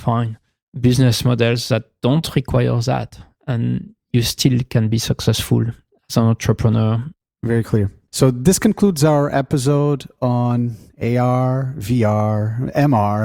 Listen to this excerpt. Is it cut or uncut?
uncut